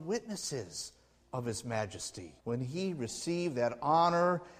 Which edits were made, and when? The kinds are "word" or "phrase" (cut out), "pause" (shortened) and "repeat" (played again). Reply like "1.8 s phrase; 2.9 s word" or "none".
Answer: 2.4 s pause